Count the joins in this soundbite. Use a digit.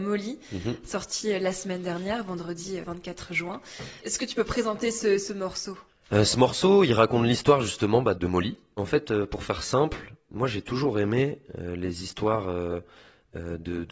0